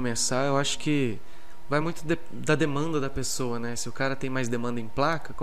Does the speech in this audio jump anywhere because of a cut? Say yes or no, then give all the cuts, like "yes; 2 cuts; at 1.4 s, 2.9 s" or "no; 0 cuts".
no; 0 cuts